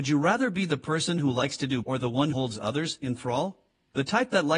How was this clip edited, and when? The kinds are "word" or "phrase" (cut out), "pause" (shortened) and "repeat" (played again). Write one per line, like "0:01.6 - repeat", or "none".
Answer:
0:01.8 - word
0:02.3 - word